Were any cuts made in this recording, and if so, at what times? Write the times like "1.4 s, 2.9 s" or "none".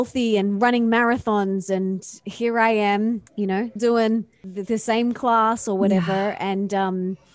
3.3 s, 3.8 s

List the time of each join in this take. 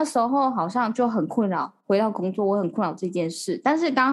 1.8 s

